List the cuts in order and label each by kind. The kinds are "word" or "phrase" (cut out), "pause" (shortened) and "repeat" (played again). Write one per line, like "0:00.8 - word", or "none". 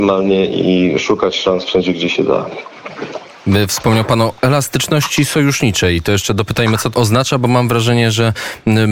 0:06.9 - word